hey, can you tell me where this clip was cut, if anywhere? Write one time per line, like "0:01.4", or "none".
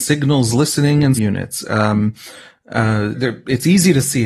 0:01.1
0:03.1